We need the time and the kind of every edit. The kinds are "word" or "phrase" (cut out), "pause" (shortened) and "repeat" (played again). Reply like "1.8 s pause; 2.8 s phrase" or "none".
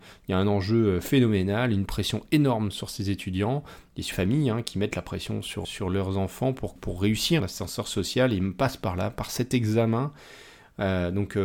4.1 s word; 5.6 s word; 6.8 s word; 7.4 s word